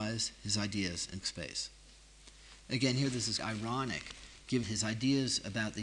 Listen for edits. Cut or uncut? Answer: cut